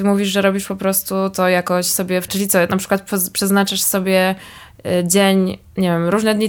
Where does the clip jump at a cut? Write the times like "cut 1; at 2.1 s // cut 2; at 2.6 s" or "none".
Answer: cut 1; at 2.3 s